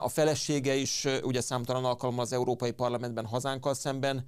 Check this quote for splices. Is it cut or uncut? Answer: uncut